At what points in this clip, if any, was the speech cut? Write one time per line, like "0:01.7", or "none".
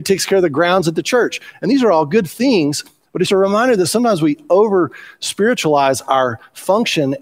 0:03.3